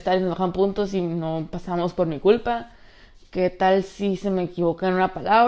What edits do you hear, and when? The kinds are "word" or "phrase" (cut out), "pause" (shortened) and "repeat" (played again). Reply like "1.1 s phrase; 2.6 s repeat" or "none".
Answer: none